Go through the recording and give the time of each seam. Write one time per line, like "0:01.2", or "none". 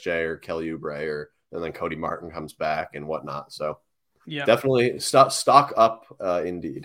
none